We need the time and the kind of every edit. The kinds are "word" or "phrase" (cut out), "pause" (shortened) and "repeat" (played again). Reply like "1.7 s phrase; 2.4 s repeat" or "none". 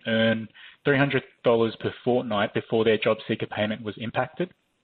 none